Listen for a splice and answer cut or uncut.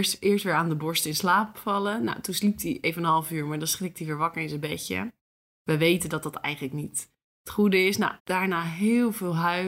cut